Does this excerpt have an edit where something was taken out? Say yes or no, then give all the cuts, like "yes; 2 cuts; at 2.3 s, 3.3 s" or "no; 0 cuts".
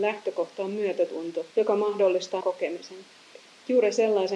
yes; 2 cuts; at 1.5 s, 2.4 s